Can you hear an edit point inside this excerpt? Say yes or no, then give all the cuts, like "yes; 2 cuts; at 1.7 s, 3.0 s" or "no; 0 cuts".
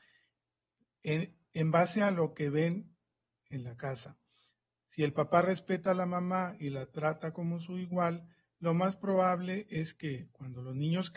no; 0 cuts